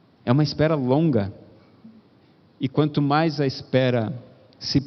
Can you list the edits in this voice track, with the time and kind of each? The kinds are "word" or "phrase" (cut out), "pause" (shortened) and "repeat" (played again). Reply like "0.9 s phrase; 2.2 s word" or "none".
none